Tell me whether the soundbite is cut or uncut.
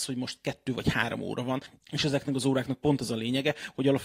uncut